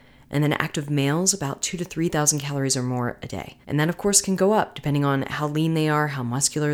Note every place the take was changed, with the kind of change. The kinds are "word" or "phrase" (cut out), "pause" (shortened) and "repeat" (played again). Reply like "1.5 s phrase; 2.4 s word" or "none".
3.6 s pause